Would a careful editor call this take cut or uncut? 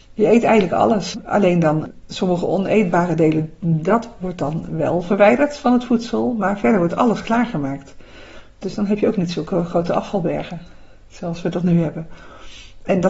uncut